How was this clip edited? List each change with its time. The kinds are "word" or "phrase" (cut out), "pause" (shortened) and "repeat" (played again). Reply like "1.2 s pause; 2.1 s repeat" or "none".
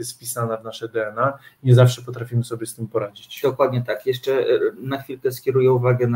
none

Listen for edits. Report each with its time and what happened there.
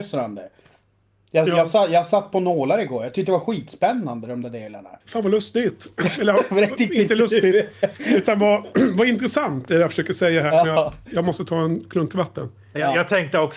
5.0 s pause

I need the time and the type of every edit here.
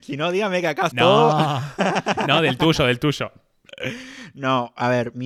0.9 s word

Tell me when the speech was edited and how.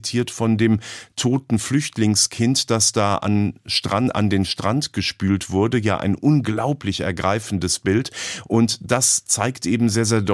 none

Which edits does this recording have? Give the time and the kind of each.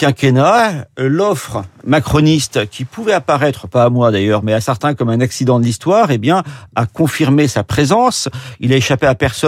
none

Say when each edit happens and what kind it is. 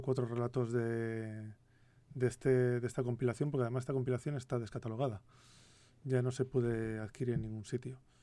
none

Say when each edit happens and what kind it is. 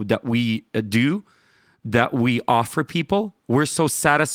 none

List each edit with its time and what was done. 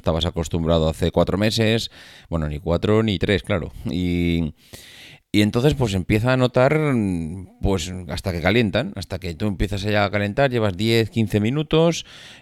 none

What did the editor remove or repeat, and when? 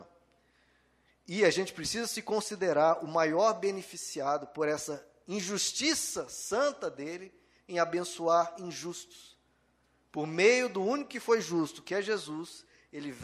none

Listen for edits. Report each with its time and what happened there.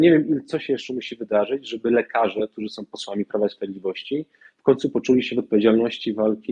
none

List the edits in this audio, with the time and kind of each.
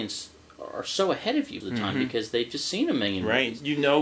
1.6 s word

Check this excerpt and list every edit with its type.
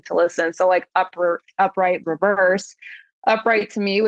2.0 s word

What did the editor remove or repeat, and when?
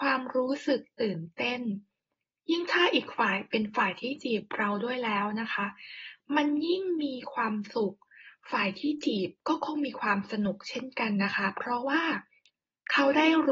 none

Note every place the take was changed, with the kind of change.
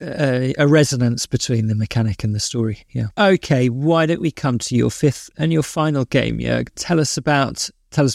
3.1 s pause

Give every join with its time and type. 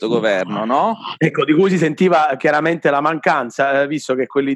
none

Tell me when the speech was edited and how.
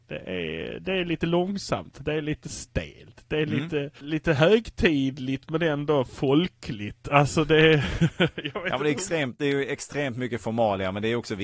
3.9 s pause

